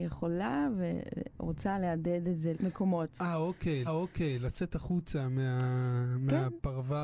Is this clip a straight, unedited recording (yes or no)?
no